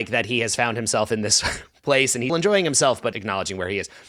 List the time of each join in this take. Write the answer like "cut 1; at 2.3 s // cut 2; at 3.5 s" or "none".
cut 1; at 2.3 s // cut 2; at 3.1 s